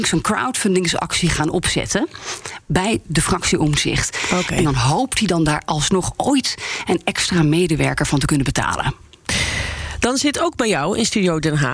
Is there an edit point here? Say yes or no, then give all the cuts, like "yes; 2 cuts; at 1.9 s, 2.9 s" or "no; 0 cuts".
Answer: no; 0 cuts